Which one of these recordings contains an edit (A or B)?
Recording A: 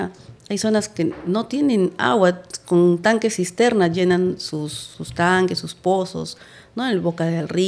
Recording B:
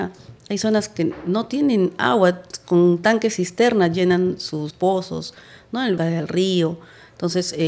B